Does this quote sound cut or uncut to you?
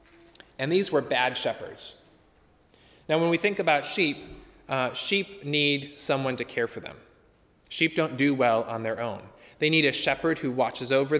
uncut